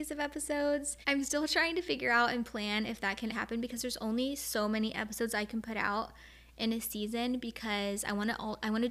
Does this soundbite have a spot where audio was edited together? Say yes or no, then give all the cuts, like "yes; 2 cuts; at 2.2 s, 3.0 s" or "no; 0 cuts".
yes; 1 cut; at 3.3 s